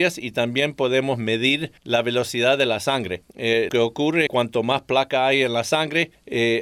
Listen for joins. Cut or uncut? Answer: cut